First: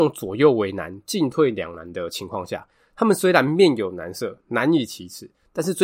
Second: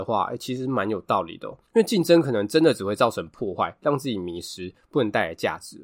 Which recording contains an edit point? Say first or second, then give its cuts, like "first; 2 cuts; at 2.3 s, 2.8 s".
second; 1 cut; at 1.7 s